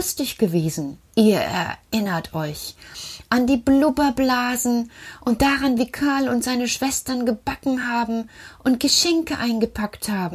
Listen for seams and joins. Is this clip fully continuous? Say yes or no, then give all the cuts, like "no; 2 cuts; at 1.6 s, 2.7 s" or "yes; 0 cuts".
yes; 0 cuts